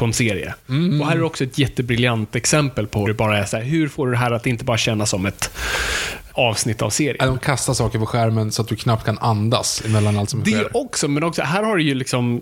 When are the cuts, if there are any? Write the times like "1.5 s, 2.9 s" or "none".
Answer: 3.0 s, 6.3 s